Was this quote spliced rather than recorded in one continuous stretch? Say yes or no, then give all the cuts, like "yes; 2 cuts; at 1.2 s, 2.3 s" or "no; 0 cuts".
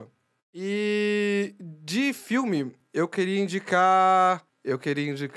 no; 0 cuts